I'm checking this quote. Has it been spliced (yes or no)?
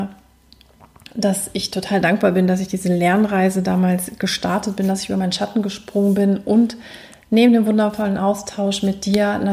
no